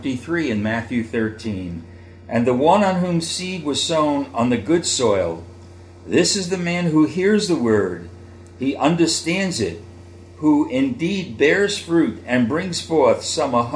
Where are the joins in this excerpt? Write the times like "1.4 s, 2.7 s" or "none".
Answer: none